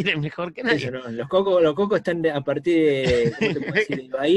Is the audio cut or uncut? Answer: uncut